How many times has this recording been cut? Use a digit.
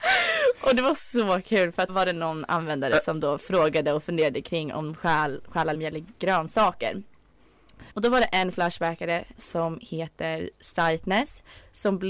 4